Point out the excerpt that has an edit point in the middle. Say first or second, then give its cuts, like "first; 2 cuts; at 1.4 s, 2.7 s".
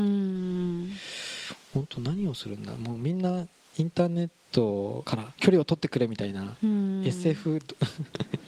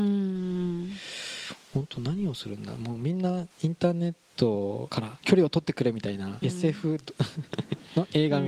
second; 2 cuts; at 3.5 s, 6.4 s